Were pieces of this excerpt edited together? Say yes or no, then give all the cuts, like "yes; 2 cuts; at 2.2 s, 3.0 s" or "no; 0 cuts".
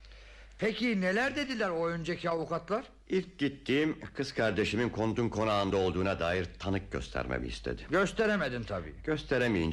no; 0 cuts